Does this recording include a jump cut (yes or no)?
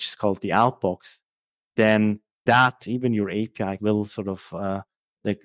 yes